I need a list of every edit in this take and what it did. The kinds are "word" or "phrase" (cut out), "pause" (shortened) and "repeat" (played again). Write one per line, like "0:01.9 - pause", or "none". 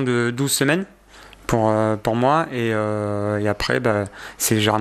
none